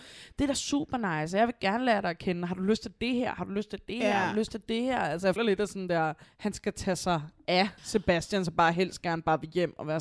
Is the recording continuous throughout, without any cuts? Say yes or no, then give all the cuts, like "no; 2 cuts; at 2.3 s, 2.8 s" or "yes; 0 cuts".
no; 3 cuts; at 5.4 s, 6.2 s, 7.8 s